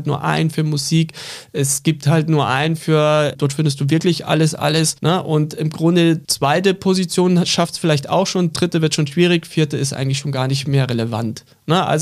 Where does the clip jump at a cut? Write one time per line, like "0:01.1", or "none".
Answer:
0:06.2